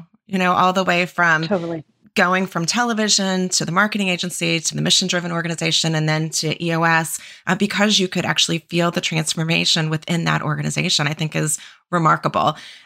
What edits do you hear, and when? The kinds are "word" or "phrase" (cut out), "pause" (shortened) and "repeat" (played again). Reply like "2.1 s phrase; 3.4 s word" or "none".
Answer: none